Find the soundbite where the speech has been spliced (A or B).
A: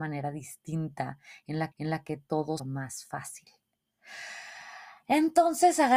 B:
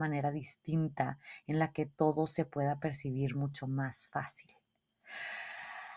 A